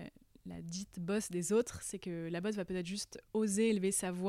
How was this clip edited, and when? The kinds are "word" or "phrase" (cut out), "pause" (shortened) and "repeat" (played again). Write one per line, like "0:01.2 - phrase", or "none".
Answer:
0:03.3 - pause

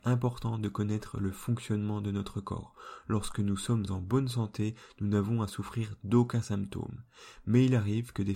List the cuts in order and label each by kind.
none

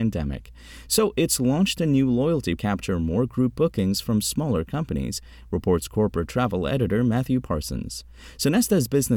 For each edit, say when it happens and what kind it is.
0:02.6 - phrase

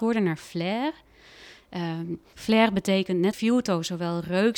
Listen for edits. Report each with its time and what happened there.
0:03.3 - word

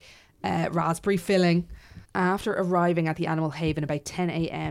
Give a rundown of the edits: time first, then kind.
0:02.1 - pause

